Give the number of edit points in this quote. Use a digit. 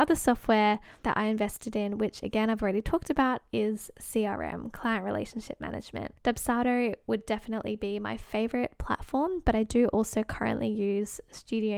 0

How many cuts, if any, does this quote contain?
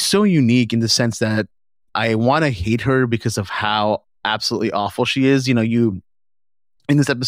1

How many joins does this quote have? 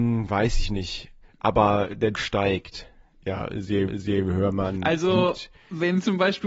3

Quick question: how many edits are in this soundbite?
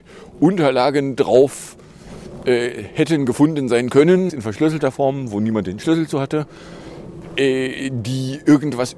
1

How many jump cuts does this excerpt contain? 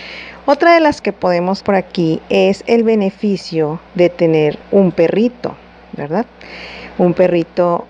4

